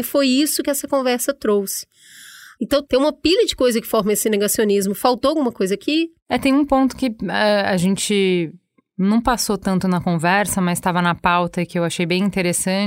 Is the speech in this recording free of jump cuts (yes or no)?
yes